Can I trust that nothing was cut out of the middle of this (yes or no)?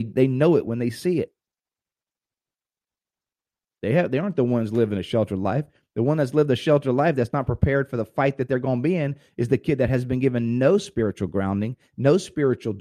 yes